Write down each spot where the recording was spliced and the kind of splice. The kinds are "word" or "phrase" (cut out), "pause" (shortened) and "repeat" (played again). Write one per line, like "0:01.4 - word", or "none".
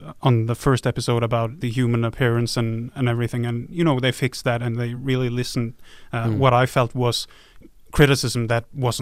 none